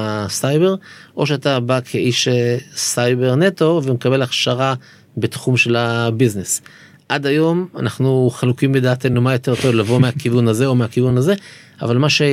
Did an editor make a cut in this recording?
no; 0 cuts

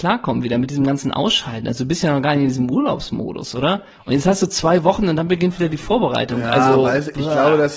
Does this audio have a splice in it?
no; 0 cuts

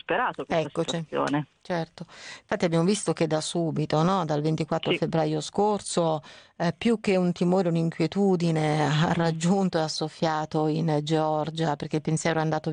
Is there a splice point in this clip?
no; 0 cuts

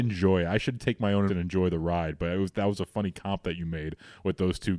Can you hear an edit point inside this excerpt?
yes; 1 cut; at 1.3 s

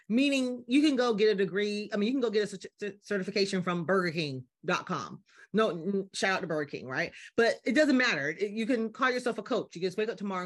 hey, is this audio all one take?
yes; 0 cuts

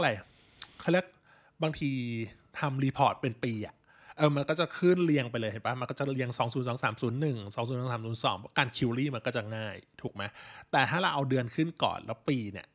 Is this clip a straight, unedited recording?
yes; 0 cuts

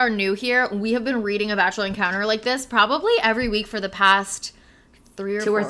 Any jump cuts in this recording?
no; 0 cuts

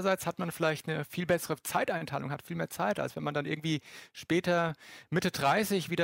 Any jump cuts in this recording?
no; 0 cuts

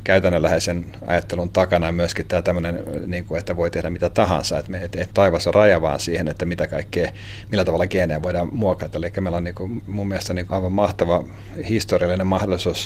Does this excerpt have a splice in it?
yes; 2 cuts; at 4.9 s, 10.5 s

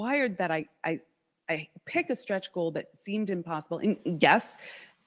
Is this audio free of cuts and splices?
yes; 0 cuts

